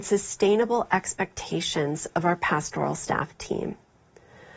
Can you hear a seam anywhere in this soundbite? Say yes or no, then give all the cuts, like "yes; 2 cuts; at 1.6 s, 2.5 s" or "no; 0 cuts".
no; 0 cuts